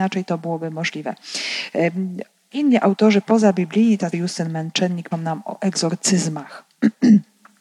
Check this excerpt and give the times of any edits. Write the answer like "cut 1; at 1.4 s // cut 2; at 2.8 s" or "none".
cut 1; at 2.5 s // cut 2; at 4.1 s // cut 3; at 5.1 s

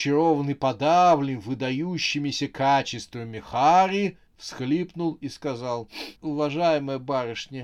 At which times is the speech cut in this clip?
cut 1; at 4.3 s // cut 2; at 6.2 s

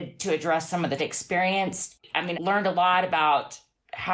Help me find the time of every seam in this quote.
cut 1; at 1.0 s // cut 2; at 2.3 s

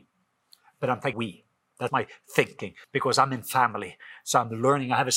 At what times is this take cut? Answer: cut 1; at 1.1 s // cut 2; at 1.9 s // cut 3; at 2.8 s

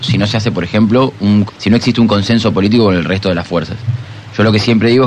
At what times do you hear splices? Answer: cut 1; at 1.5 s

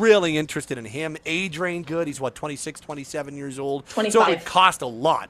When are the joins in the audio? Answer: cut 1; at 1.8 s // cut 2; at 4.3 s

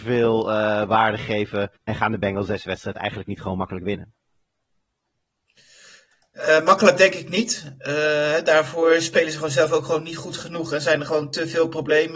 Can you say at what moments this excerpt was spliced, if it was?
cut 1; at 1.8 s

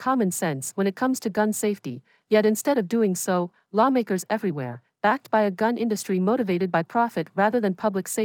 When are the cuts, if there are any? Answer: none

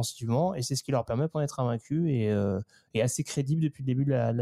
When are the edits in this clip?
cut 1; at 1.3 s

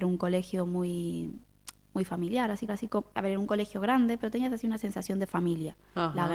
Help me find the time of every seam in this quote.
cut 1; at 2.7 s

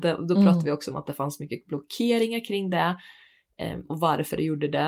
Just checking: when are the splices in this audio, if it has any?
none

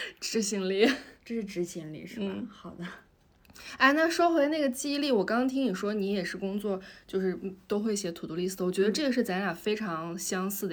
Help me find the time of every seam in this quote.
none

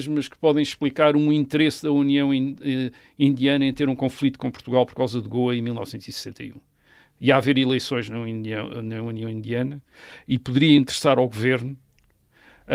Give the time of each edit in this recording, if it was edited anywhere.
none

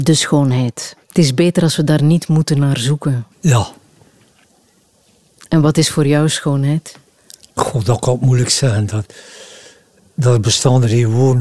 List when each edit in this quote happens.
cut 1; at 1.0 s // cut 2; at 3.3 s // cut 3; at 7.2 s

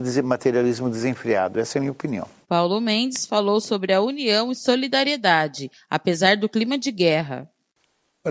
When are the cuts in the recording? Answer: cut 1; at 2.4 s

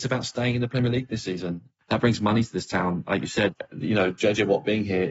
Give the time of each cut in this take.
none

